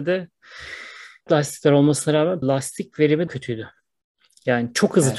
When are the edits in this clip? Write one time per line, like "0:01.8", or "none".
0:01.3
0:02.4
0:03.3